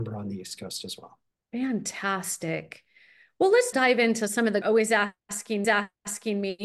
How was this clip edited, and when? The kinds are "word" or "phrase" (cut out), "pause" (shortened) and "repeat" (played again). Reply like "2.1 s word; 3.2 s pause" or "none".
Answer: 1.3 s pause; 3.7 s word; 4.6 s phrase; 5.6 s repeat